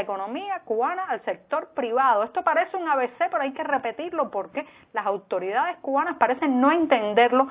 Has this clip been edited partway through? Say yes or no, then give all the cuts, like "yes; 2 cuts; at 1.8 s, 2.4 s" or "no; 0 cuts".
no; 0 cuts